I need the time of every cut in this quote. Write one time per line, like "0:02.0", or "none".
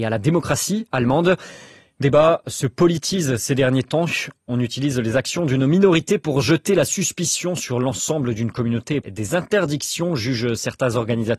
0:02.0
0:09.0